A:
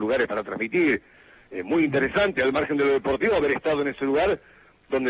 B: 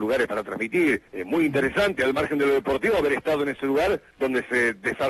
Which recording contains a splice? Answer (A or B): B